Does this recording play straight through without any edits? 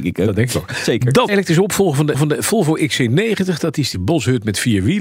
no; 3 cuts; at 1.3 s, 2.1 s, 3.9 s

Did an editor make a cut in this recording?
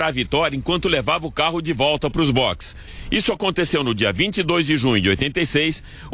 no; 0 cuts

